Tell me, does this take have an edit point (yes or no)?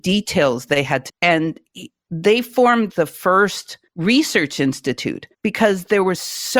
yes